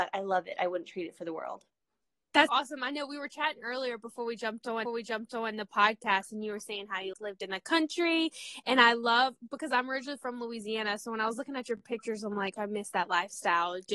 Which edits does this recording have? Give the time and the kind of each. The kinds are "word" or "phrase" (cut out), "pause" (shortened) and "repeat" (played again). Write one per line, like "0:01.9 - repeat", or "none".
0:02.5 - word
0:04.8 - repeat
0:07.1 - word
0:12.6 - phrase